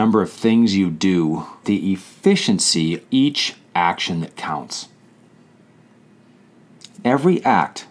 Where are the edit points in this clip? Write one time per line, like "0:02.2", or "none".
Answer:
0:01.6
0:03.0
0:03.7